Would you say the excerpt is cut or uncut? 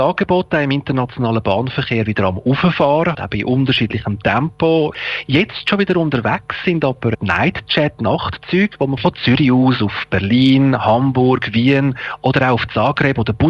cut